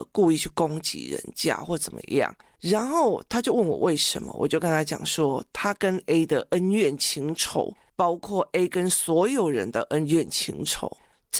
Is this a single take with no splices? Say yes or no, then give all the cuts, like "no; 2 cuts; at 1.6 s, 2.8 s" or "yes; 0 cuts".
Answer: yes; 0 cuts